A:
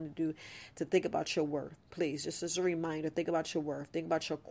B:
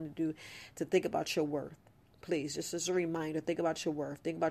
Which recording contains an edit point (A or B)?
A